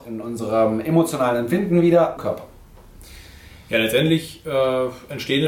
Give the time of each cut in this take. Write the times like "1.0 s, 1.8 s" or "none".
2.2 s

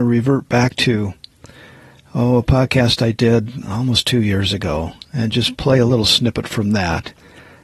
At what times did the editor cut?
none

